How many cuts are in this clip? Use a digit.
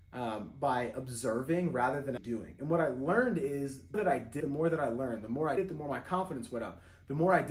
4